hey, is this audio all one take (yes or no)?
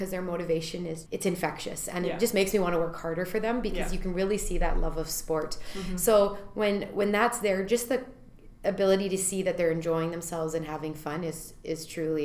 no